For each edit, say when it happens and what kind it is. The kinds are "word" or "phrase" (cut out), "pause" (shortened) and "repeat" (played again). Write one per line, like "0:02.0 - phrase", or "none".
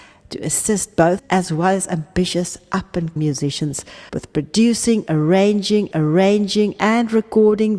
0:01.2 - word
0:03.2 - word
0:04.1 - pause
0:05.9 - repeat

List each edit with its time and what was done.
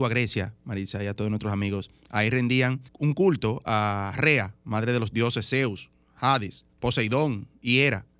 0:02.9 - pause
0:06.7 - pause

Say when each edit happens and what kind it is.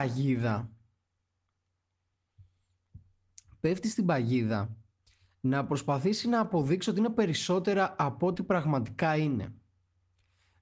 none

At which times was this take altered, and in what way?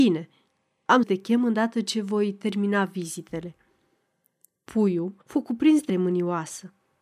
0:01.0 - word
0:05.2 - pause
0:05.9 - phrase

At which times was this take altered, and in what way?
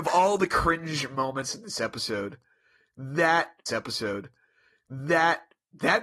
0:03.7 - repeat

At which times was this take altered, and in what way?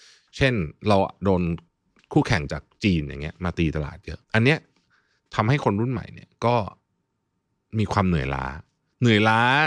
0:04.2 - pause

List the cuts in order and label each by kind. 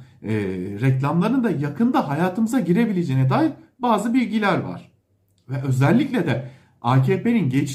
none

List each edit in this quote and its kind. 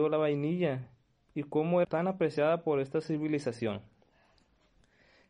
0:01.8 - word

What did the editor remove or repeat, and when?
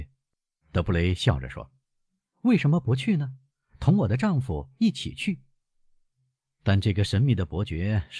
none

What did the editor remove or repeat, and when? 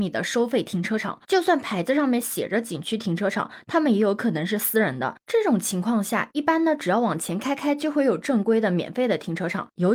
0:01.2 - pause

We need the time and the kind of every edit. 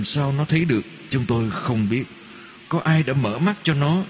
0:02.7 - word

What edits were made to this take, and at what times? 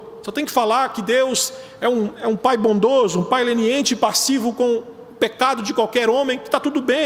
none

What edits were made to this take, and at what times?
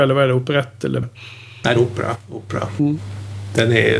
0:01.0 - phrase
0:01.8 - phrase

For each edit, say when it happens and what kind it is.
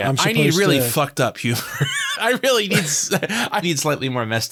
0:02.2 - word
0:03.6 - word

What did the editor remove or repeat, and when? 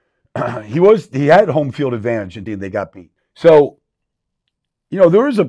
0:02.5 - word
0:03.2 - pause

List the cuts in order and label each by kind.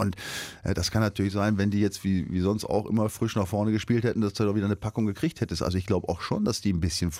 none

